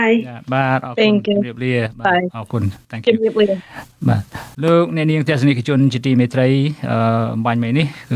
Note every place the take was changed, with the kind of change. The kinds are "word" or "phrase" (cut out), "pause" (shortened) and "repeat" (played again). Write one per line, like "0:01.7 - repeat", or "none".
0:04.5 - pause